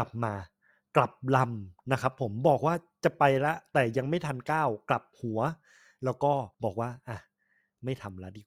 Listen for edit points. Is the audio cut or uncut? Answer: cut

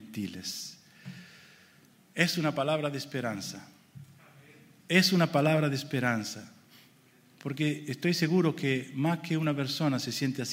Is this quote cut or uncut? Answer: uncut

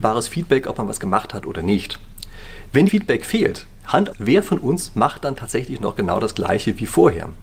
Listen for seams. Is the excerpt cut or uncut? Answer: cut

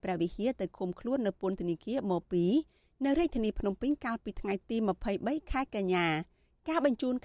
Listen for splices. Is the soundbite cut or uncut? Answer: uncut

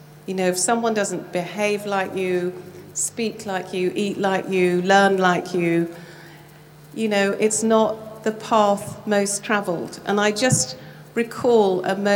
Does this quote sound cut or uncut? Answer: uncut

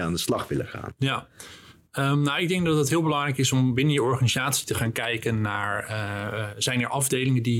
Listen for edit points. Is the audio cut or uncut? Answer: uncut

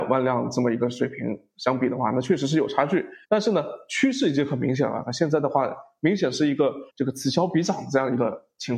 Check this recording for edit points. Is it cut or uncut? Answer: cut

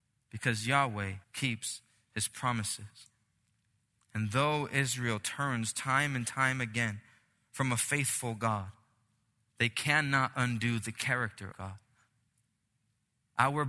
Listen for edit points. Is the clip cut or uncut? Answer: cut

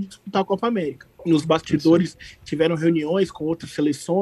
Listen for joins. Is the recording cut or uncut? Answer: cut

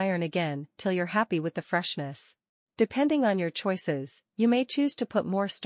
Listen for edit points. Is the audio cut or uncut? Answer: cut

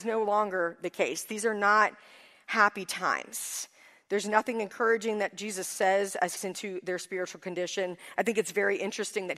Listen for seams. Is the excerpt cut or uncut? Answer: cut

